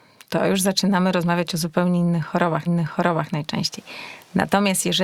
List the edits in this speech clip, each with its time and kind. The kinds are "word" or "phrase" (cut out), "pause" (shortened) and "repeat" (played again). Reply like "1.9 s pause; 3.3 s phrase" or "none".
2.7 s repeat